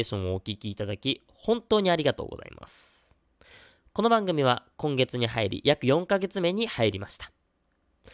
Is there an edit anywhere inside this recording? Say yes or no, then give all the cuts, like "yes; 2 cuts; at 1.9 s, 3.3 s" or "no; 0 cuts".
no; 0 cuts